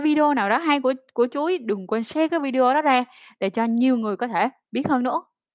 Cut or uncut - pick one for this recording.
uncut